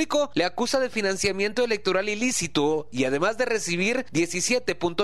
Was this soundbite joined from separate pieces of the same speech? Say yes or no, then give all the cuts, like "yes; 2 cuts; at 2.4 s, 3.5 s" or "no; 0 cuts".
no; 0 cuts